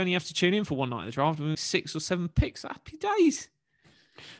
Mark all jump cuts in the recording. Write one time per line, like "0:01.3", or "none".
0:01.5